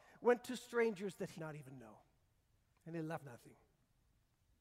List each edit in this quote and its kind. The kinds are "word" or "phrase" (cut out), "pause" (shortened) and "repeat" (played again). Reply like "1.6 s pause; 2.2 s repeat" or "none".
1.4 s word; 3.2 s word